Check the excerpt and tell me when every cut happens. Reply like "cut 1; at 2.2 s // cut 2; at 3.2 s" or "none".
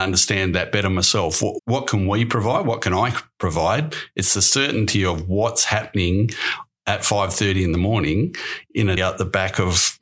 cut 1; at 1.6 s // cut 2; at 9.0 s